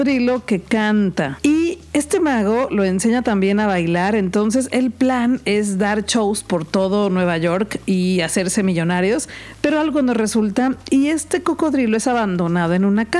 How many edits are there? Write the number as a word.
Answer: zero